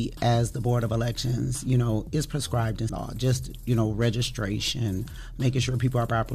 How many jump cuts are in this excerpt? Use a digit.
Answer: 1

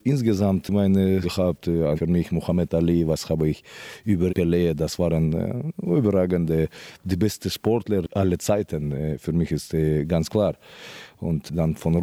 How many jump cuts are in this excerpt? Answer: 3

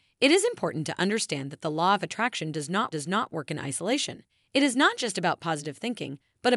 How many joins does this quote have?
2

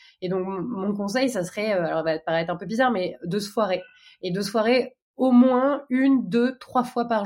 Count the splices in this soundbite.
0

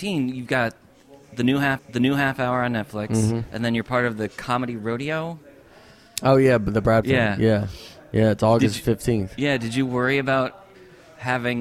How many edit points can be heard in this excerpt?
2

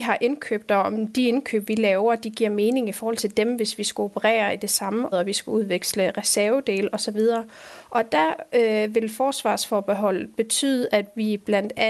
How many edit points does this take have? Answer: 1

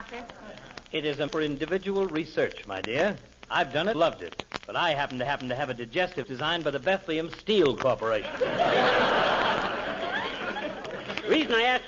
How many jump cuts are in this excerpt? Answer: 4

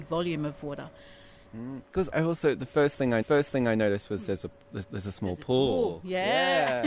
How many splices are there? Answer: 3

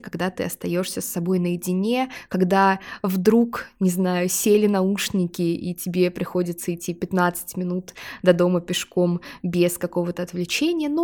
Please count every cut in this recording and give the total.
0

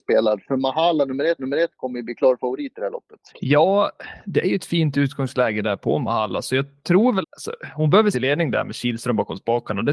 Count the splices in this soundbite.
4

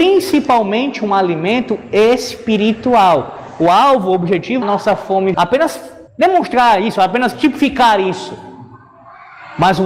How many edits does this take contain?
3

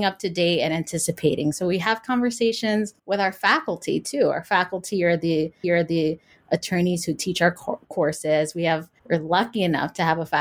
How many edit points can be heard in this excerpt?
3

